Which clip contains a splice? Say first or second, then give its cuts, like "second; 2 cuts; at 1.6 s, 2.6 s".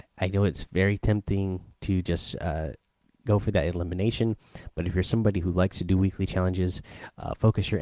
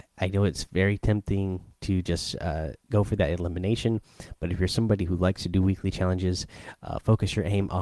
second; 1 cut; at 2.8 s